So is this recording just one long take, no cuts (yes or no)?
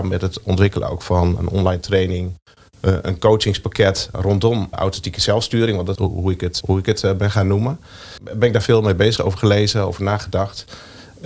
no